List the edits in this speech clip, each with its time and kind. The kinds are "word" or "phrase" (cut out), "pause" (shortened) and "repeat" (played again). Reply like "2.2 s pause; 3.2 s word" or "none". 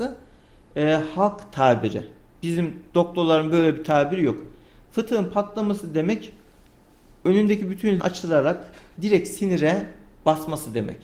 8.0 s word; 9.0 s word